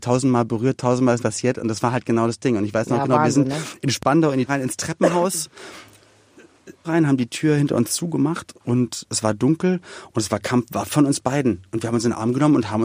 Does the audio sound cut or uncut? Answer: cut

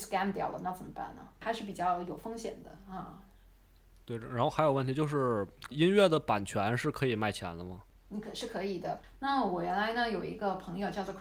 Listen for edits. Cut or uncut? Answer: cut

